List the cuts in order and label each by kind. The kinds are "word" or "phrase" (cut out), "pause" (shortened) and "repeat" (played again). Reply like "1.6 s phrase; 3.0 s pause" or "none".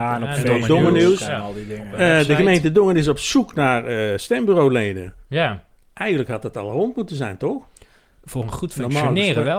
none